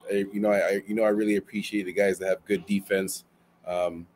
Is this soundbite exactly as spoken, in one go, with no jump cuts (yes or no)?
yes